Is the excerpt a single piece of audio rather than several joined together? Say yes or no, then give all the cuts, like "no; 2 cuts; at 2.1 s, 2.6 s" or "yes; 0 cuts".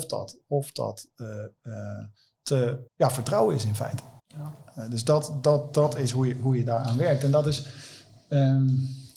no; 2 cuts; at 2.9 s, 4.2 s